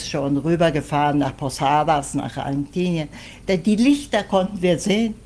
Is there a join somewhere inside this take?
no; 0 cuts

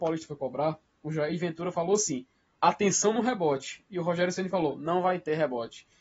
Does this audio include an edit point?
no; 0 cuts

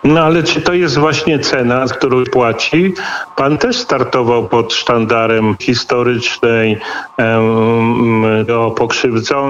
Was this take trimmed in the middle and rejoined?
yes; 5 cuts; at 1.9 s, 2.2 s, 3.6 s, 5.6 s, 8.5 s

